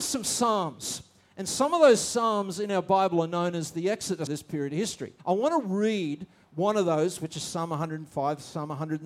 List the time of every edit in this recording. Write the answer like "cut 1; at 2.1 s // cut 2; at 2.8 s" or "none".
cut 1; at 4.3 s // cut 2; at 5.2 s